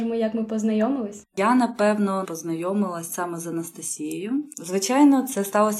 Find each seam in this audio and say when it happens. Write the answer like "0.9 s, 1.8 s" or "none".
2.2 s